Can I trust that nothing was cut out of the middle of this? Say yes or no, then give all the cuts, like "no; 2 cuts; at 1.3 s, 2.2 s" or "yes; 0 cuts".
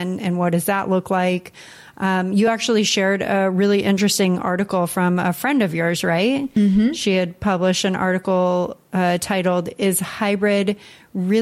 yes; 0 cuts